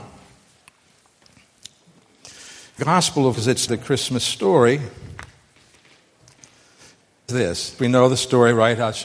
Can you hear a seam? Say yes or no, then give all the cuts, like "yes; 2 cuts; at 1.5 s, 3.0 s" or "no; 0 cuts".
yes; 5 cuts; at 2.8 s, 3.3 s, 3.7 s, 7.3 s, 7.8 s